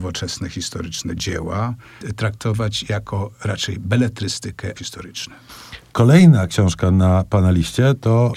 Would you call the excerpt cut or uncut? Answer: cut